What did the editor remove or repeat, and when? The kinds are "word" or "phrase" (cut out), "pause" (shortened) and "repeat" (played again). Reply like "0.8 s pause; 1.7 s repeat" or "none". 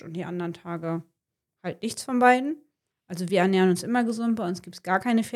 none